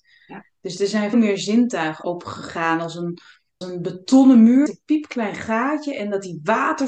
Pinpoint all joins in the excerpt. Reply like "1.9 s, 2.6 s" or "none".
1.1 s, 2.0 s, 3.6 s, 4.7 s